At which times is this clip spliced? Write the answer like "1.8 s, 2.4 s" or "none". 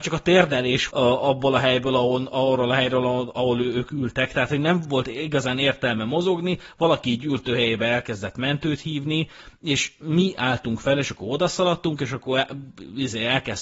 0.9 s